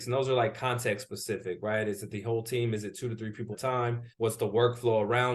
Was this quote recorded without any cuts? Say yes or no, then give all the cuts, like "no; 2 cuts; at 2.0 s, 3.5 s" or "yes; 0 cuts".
no; 2 cuts; at 3.5 s, 4.1 s